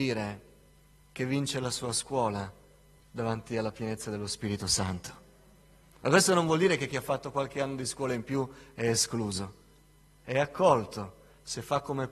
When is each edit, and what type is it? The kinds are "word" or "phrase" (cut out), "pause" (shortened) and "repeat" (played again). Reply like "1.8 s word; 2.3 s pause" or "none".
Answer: none